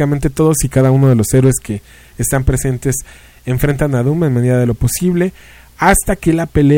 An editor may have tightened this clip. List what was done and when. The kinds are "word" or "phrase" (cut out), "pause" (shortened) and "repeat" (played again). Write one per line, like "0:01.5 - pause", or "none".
none